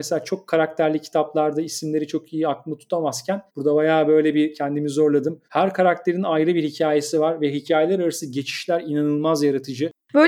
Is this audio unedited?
no; 2 cuts; at 3.5 s, 5.4 s

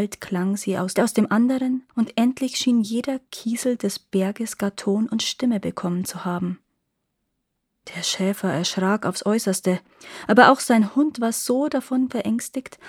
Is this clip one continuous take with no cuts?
no; 2 cuts; at 1.0 s, 1.9 s

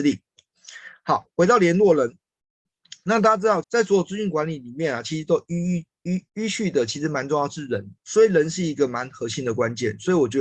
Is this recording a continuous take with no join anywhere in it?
no; 3 cuts; at 3.6 s, 6.3 s, 8.0 s

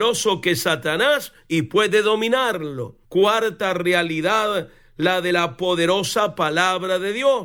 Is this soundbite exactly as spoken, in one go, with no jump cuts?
no; 1 cut; at 3.0 s

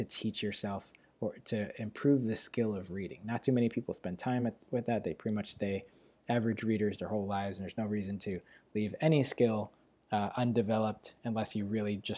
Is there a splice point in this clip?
no; 0 cuts

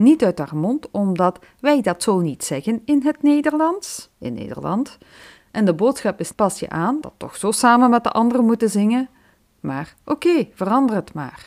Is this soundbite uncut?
no; 3 cuts; at 4.1 s, 6.3 s, 7.0 s

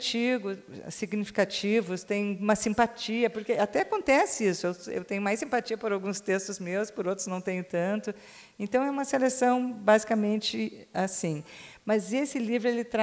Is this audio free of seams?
yes; 0 cuts

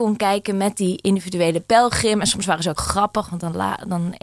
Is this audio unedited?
no; 1 cut; at 2.8 s

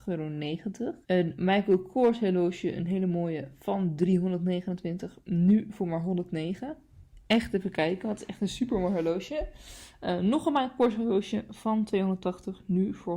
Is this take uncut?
no; 1 cut; at 1.0 s

